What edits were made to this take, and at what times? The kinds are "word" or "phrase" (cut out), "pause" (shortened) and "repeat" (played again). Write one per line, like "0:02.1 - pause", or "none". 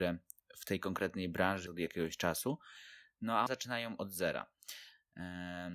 0:01.7 - word
0:03.5 - word

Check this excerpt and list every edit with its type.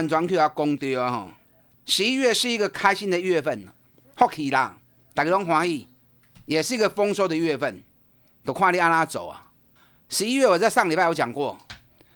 none

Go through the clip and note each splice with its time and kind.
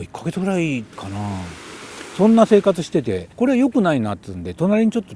0:00.9 - pause
0:03.3 - pause

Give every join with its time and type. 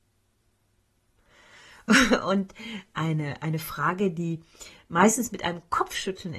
none

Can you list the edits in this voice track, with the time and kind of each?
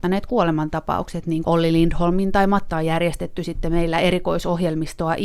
0:01.4 - word
0:02.7 - phrase

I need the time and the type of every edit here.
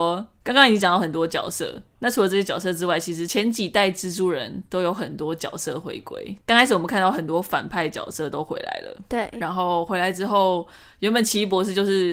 none

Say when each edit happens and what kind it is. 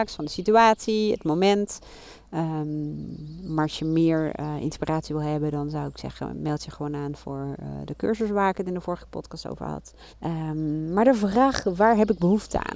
0:10.1 - pause

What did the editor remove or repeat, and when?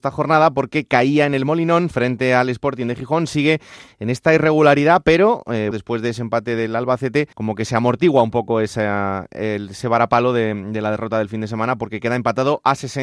0:05.7 - word
0:07.3 - pause

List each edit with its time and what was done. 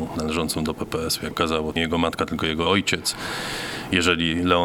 0:01.3 - word
0:01.8 - word

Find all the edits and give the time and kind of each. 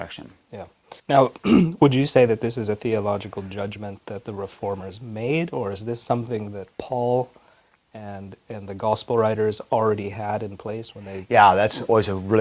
0:01.0 - pause
0:06.7 - pause

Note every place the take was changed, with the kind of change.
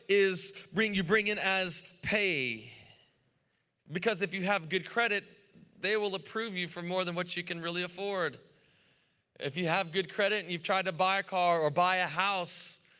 none

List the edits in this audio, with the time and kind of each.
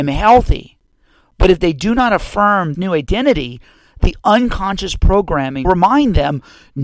0:02.7 - word
0:05.6 - word

